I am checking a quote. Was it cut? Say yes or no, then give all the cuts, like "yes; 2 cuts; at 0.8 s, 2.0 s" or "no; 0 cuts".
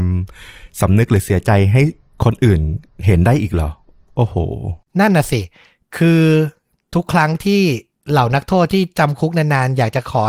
no; 0 cuts